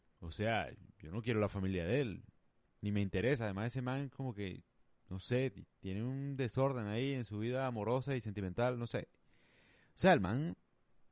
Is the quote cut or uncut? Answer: uncut